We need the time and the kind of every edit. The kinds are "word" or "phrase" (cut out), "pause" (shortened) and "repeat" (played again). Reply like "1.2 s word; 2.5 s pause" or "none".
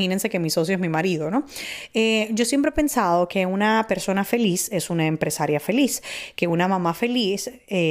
none

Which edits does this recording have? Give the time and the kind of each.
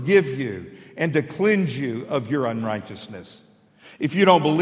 none

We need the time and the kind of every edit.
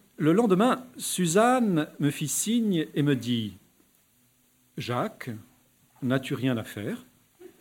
none

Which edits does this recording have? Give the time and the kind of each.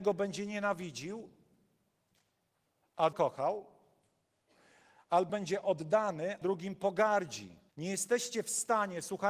3.1 s word; 5.3 s word; 6.4 s word; 7.7 s pause

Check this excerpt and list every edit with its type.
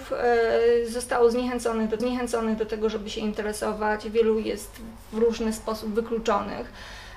2.0 s repeat

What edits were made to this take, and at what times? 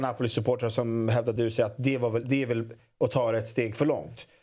none

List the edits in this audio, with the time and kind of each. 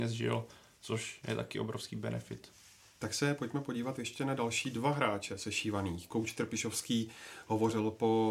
none

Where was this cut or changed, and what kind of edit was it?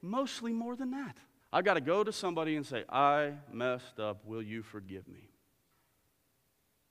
1.4 s pause

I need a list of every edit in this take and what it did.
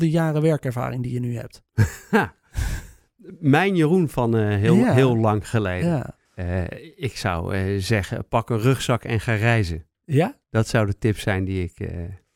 1.7 s pause; 6.3 s pause; 10.4 s pause

